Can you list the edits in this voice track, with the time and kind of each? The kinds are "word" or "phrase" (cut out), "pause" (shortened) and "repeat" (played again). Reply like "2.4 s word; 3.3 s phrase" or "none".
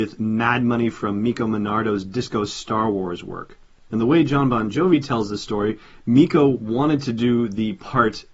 none